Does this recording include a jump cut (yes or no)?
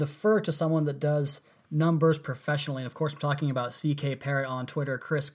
no